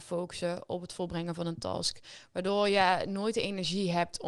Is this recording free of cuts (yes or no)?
yes